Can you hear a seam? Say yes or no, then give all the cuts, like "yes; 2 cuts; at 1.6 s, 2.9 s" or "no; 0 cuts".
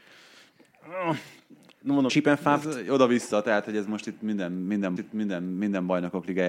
yes; 2 cuts; at 2.1 s, 5.0 s